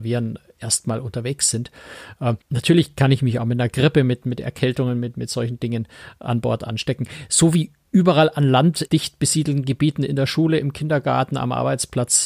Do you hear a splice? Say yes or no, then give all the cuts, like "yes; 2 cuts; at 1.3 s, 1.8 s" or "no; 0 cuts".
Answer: yes; 2 cuts; at 2.4 s, 8.9 s